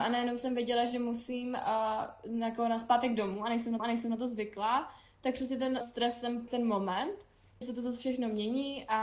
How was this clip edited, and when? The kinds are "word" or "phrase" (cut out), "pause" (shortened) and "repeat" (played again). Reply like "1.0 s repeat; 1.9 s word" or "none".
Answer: 3.8 s repeat; 5.8 s word; 6.5 s phrase; 7.6 s word